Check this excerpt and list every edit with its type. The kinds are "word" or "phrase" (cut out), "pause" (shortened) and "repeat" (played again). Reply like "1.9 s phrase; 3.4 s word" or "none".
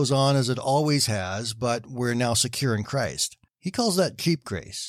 3.5 s pause